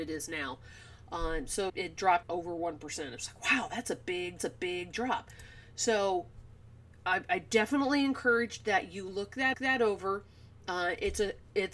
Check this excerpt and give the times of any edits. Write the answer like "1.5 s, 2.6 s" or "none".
1.7 s, 2.2 s, 4.4 s, 9.5 s